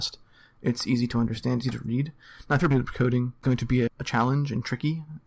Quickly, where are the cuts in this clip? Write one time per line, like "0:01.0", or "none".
0:01.6
0:02.7
0:03.4
0:03.9